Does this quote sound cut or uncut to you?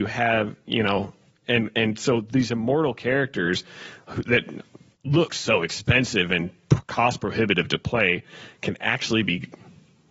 uncut